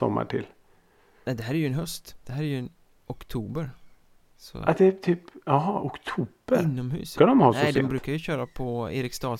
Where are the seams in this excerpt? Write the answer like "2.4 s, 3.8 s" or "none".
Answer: 7.1 s